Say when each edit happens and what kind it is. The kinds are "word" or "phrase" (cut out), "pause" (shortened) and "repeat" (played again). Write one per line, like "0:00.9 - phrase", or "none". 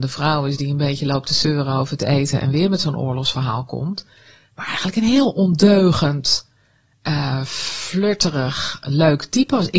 none